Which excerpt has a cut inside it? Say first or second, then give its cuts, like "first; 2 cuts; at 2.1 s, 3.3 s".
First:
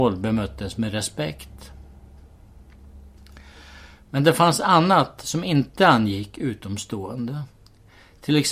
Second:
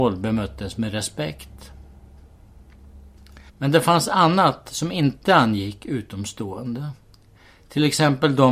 second; 1 cut; at 3.5 s